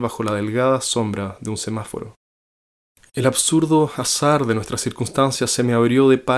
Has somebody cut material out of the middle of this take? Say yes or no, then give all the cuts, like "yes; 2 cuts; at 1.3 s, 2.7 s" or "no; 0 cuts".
no; 0 cuts